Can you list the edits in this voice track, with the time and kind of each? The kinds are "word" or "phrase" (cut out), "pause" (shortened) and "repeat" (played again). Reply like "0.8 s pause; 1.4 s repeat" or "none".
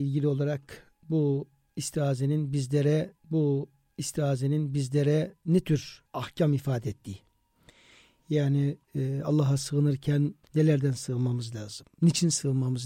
3.2 s repeat; 6.1 s pause; 8.8 s pause; 10.4 s pause